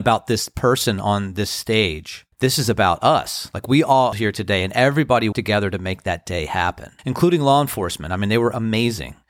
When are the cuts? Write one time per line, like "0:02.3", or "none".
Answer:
0:02.3
0:04.1
0:05.3
0:07.0

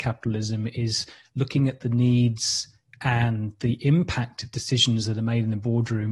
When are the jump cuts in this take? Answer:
none

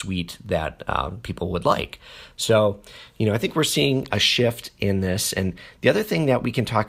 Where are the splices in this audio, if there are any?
none

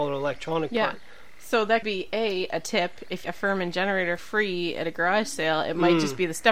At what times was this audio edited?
0:01.8
0:03.2
0:04.2

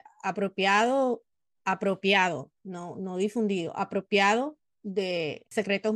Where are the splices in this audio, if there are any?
none

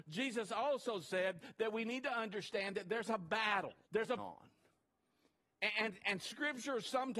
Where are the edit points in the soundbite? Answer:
0:03.8
0:04.2

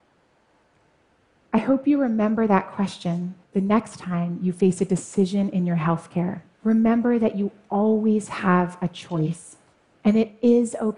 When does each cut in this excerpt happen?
0:03.4
0:06.5
0:09.7

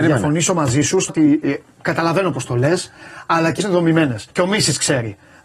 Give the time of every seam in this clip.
0:01.1
0:03.6
0:04.3

